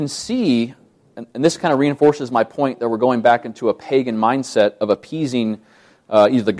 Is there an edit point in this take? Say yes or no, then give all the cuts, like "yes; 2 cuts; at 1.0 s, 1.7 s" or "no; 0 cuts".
no; 0 cuts